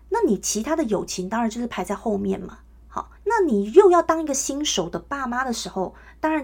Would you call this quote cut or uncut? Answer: cut